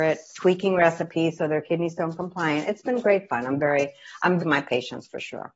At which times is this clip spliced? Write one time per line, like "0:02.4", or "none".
0:04.4